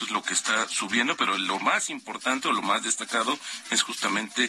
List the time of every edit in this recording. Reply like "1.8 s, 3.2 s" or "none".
none